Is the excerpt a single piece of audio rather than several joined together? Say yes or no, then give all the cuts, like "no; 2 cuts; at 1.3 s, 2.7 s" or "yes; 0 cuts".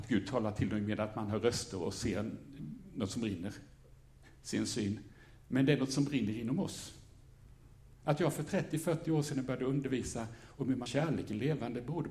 no; 1 cut; at 10.9 s